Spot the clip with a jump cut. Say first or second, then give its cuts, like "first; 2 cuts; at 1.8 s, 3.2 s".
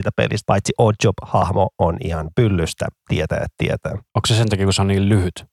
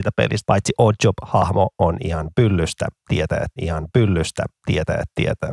second; 1 cut; at 3.6 s